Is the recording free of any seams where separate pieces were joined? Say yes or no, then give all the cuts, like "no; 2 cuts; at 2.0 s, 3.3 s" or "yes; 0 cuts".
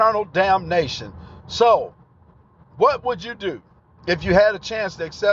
yes; 0 cuts